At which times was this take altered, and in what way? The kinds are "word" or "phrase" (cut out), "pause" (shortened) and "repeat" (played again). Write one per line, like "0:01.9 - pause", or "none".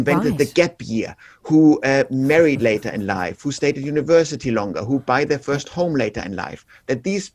none